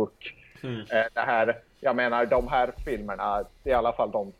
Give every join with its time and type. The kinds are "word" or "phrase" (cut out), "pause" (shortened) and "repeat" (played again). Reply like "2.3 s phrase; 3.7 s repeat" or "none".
none